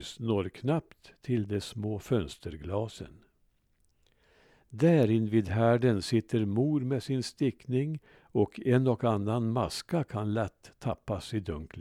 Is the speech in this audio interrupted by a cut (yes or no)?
no